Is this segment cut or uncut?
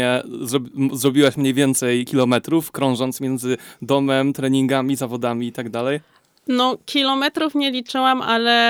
uncut